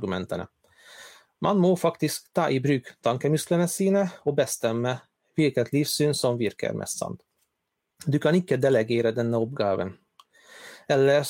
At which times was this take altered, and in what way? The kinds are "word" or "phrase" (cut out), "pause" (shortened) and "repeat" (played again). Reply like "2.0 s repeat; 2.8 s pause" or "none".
none